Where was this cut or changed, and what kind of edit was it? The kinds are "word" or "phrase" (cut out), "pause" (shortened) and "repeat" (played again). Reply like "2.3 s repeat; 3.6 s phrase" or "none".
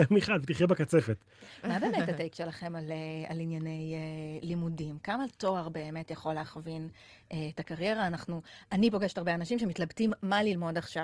none